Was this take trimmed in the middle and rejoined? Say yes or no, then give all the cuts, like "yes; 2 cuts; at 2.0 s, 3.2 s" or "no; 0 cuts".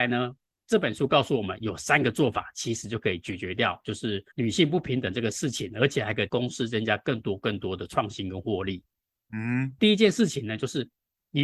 yes; 2 cuts; at 4.3 s, 9.8 s